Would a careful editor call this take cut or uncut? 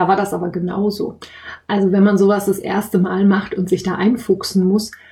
uncut